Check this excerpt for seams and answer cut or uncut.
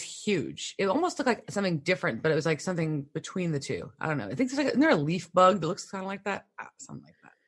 uncut